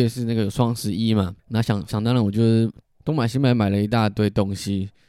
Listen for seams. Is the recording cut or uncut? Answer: cut